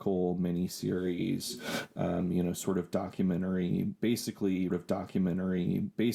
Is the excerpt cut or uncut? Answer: cut